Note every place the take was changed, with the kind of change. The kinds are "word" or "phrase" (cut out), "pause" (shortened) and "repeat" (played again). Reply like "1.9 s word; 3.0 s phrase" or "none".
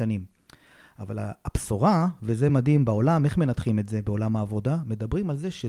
none